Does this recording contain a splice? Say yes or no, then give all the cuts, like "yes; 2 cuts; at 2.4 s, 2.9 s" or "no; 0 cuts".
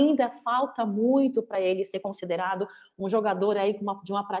no; 0 cuts